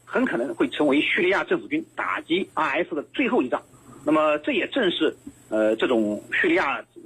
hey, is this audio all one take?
no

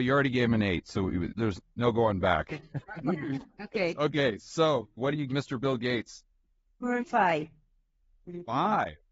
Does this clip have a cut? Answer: yes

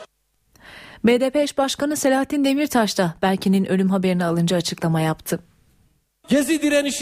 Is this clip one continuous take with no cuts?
yes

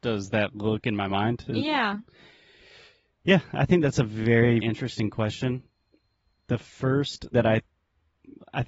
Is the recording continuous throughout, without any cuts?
no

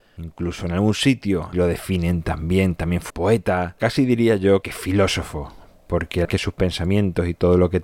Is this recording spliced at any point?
yes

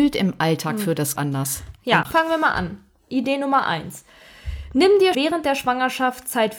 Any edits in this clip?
yes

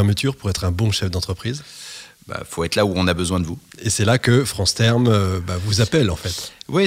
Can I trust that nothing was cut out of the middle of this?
no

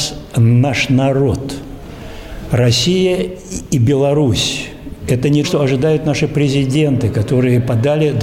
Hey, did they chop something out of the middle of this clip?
yes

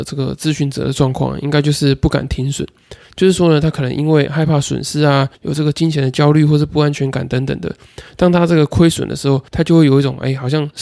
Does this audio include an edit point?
yes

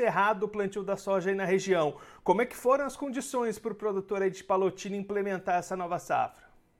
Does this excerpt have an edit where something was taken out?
no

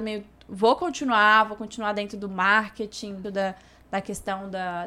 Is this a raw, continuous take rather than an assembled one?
no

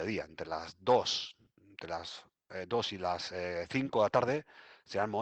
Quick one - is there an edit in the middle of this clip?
no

